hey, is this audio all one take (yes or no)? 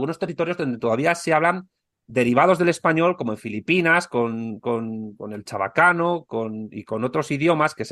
yes